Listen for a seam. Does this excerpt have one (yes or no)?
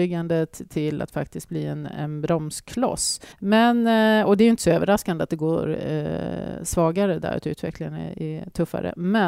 yes